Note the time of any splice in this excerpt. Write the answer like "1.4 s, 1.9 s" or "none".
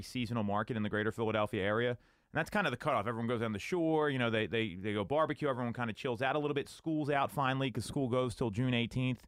none